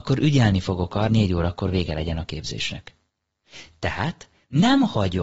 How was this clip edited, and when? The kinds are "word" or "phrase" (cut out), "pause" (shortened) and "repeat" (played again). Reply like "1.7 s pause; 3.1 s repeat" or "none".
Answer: 1.1 s word